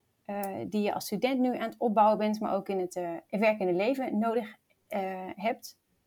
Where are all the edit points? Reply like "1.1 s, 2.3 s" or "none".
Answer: none

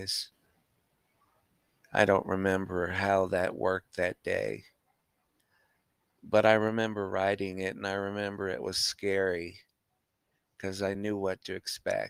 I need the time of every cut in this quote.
none

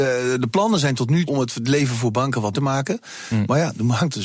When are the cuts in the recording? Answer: 1.3 s, 2.5 s

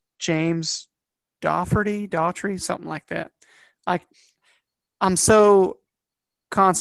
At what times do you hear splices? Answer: none

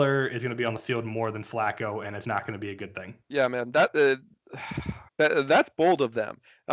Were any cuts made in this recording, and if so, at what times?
2.2 s, 3.2 s, 5.1 s

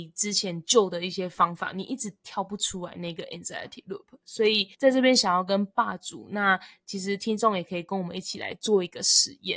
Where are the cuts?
4.7 s

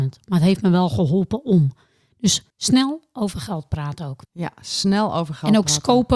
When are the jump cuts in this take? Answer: 2.5 s, 4.2 s

